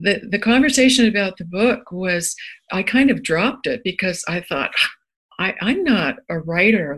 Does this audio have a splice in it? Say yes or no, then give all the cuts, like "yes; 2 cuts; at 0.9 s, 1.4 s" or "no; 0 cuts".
no; 0 cuts